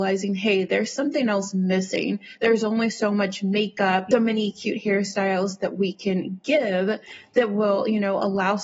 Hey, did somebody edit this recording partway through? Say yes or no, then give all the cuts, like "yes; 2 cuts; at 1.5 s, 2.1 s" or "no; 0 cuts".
yes; 1 cut; at 4.1 s